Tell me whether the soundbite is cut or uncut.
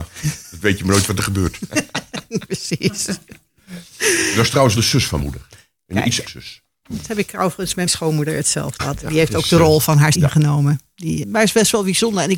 cut